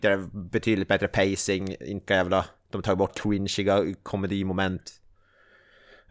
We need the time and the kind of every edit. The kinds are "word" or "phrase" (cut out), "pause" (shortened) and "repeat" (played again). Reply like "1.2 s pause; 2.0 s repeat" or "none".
2.1 s word; 3.1 s word